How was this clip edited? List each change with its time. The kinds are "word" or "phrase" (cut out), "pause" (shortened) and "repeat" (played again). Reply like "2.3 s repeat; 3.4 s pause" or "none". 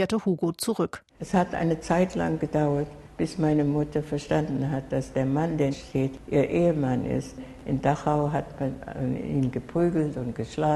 1.1 s pause; 5.7 s phrase